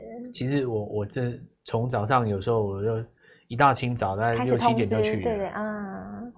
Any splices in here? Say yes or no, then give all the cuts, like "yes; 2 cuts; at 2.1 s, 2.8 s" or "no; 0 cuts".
no; 0 cuts